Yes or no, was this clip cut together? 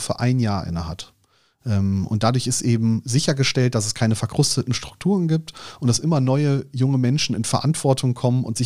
no